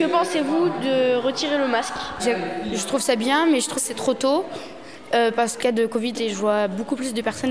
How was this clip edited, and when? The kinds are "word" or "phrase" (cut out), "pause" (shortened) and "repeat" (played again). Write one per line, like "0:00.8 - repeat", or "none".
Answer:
0:02.2 - word
0:03.8 - word
0:05.6 - word
0:06.1 - word